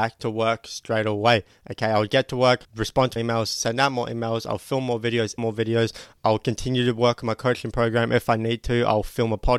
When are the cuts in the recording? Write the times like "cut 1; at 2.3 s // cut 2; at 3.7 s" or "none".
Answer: cut 1; at 2.6 s // cut 2; at 3.2 s // cut 3; at 5.4 s